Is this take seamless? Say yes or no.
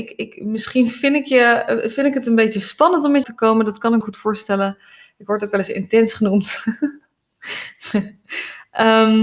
no